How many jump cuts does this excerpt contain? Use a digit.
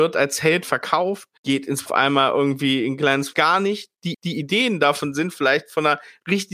4